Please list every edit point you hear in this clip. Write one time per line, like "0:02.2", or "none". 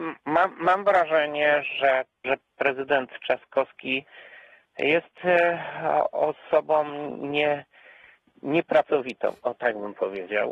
0:02.2